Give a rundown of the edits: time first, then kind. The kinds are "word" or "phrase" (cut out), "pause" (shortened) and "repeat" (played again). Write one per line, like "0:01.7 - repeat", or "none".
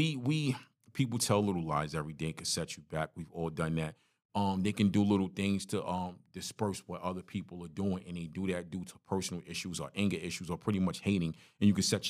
none